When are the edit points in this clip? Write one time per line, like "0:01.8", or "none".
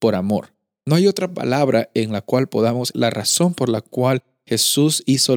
0:02.9